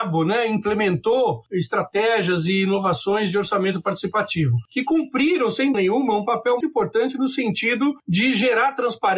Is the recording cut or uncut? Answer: cut